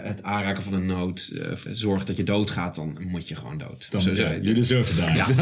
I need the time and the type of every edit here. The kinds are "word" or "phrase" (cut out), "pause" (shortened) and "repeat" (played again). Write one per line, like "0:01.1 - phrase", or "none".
0:01.7 - word